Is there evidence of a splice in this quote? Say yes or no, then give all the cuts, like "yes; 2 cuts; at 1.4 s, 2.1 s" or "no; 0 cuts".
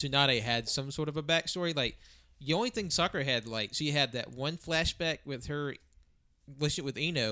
no; 0 cuts